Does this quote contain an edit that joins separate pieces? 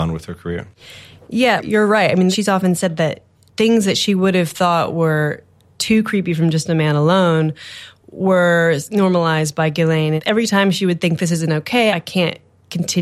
no; 0 cuts

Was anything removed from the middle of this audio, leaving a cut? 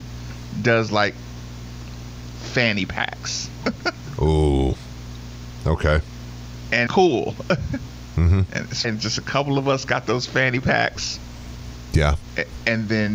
yes; 2 cuts; at 6.9 s, 8.8 s

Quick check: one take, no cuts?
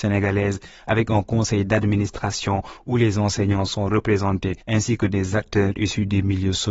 no; 1 cut; at 4.6 s

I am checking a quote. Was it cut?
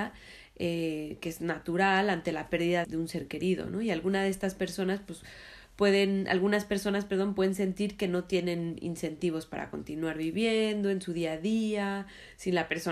yes; 1 cut; at 2.8 s

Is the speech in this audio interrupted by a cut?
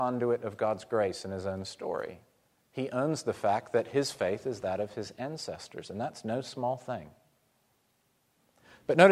no; 0 cuts

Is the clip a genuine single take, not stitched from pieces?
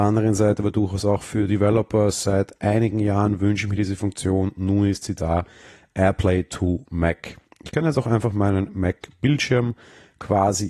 yes; 0 cuts

